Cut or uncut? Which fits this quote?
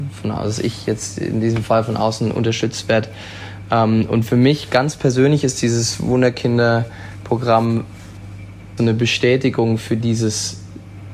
cut